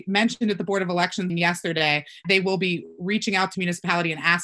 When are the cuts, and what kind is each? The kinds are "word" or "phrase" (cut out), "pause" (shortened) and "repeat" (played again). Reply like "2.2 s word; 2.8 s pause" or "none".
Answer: 1.3 s word; 2.2 s word; 3.5 s word